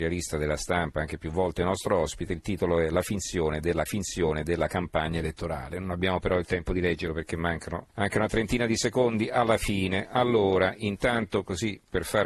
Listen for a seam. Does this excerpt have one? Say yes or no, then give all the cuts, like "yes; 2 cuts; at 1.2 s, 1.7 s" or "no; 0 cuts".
yes; 2 cuts; at 3.9 s, 7.9 s